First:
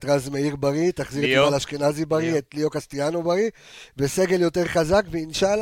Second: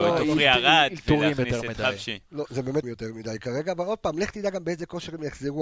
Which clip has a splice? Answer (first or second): second